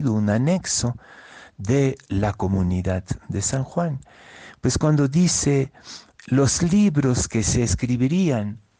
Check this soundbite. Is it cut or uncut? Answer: uncut